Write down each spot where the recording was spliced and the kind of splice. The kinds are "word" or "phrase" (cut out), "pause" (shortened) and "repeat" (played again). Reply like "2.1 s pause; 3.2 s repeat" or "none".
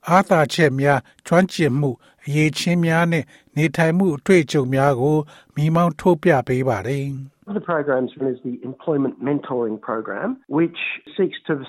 7.5 s word; 8.2 s word